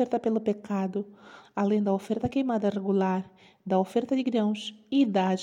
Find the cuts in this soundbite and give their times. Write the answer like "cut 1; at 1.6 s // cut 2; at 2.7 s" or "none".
none